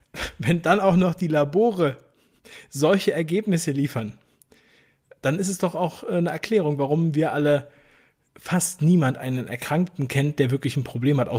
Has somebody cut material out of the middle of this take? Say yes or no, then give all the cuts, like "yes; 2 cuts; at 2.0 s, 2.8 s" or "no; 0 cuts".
no; 0 cuts